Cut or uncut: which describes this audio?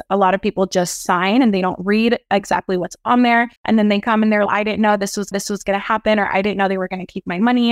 cut